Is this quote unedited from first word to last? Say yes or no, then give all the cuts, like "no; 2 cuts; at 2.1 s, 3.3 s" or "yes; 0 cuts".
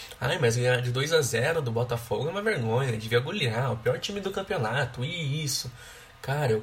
yes; 0 cuts